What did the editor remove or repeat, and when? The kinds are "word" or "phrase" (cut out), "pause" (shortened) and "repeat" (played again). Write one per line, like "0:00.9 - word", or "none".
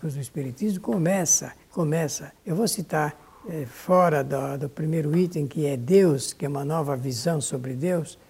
0:02.4 - pause